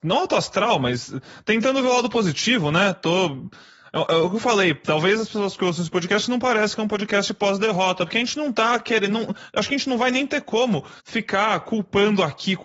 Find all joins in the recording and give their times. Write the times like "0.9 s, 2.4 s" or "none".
11.0 s